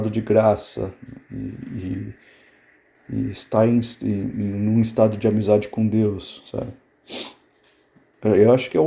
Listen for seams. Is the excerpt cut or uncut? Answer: uncut